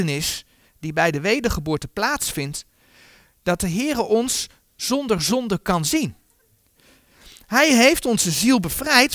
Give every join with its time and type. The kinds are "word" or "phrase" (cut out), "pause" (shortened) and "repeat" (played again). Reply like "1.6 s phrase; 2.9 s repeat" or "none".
none